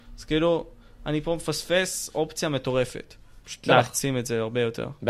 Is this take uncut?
no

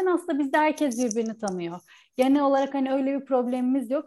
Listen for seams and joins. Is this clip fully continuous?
yes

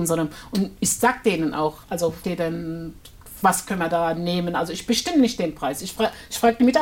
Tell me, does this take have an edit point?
yes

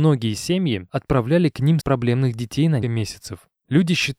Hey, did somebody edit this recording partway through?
yes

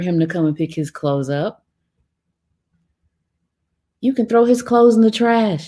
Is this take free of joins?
yes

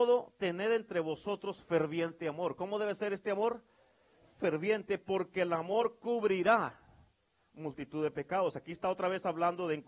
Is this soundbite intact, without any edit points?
yes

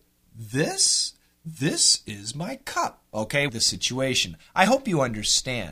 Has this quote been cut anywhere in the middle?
yes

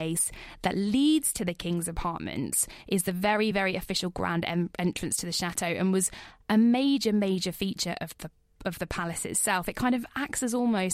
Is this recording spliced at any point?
no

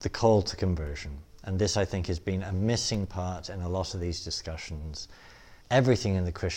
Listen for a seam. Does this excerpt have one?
yes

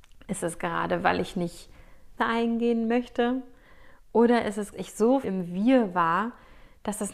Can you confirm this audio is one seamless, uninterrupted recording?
no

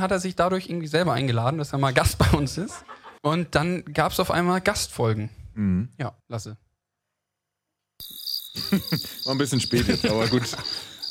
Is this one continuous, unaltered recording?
no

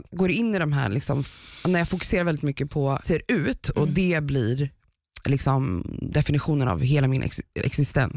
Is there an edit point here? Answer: yes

